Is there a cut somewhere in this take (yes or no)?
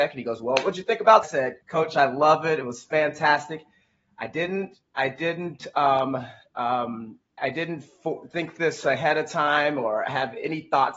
yes